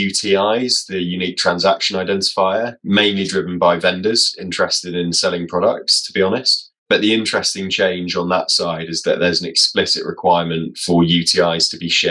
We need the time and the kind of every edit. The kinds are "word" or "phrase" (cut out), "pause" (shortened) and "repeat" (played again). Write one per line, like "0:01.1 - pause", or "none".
0:06.8 - pause